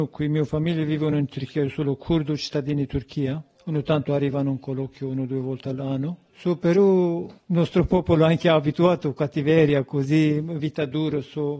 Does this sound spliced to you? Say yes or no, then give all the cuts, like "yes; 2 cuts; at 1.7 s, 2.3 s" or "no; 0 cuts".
no; 0 cuts